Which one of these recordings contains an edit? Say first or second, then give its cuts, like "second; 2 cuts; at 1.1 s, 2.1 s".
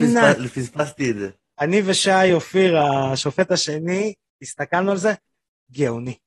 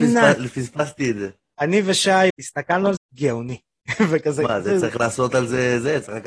second; 2 cuts; at 2.3 s, 3.0 s